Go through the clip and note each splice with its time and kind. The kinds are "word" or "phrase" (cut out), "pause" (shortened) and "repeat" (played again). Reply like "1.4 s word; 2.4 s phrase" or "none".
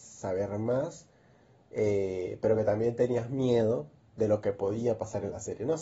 none